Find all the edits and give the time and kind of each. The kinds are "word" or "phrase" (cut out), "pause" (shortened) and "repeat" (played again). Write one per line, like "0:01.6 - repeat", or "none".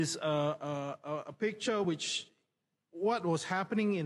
none